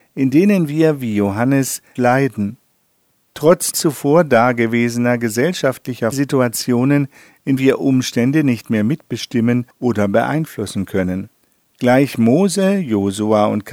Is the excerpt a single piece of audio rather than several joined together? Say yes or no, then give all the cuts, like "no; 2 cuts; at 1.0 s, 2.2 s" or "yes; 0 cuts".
no; 6 cuts; at 2.0 s, 3.7 s, 6.1 s, 7.6 s, 9.7 s, 11.4 s